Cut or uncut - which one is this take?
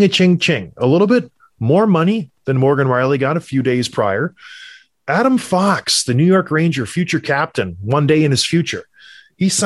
uncut